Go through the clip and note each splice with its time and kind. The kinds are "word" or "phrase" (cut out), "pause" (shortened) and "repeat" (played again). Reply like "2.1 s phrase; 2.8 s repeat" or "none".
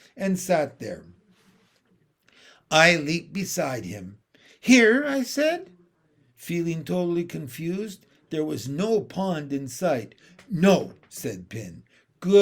none

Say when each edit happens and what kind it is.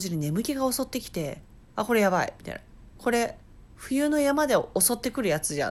1.5 s pause; 3.7 s pause

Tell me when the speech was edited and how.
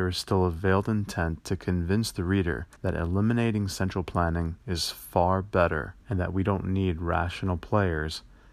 2.8 s pause; 4.6 s pause; 6.0 s pause

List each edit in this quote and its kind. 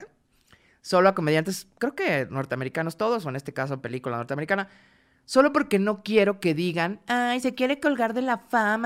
none

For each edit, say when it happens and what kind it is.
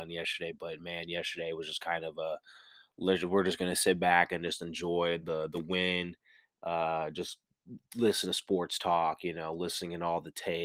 none

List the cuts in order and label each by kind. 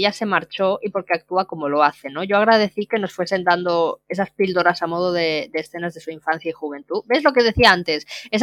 none

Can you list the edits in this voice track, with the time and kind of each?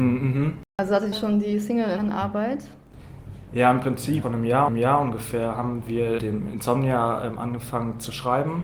1.1 s phrase; 2.0 s phrase; 4.2 s phrase; 4.7 s repeat; 6.2 s word

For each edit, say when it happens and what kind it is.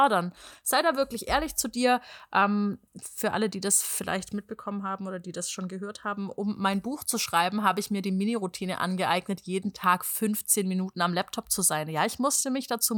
2.9 s pause

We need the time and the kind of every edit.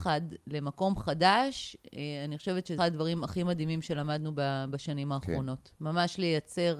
2.8 s word

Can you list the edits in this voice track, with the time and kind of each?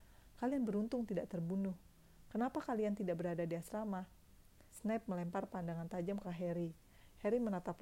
4.7 s pause; 6.2 s word

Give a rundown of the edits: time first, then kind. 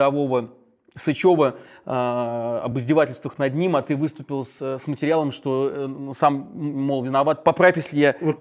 none

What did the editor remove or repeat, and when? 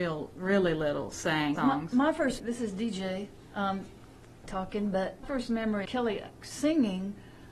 1.6 s word; 2.4 s word; 5.2 s word; 5.8 s word

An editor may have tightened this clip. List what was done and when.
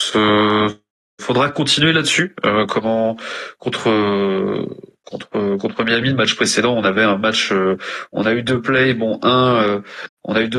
none

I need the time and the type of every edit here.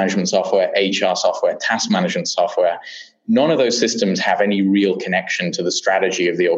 none

